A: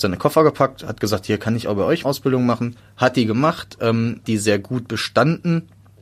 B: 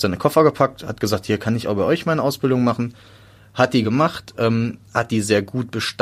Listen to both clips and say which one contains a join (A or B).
A